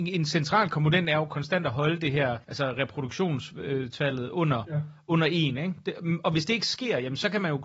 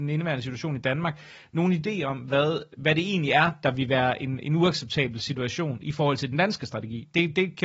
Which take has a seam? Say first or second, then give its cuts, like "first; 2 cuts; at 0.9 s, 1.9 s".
first; 1 cut; at 2.4 s